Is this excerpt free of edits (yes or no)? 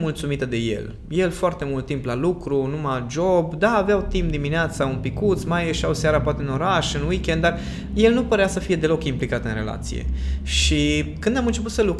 yes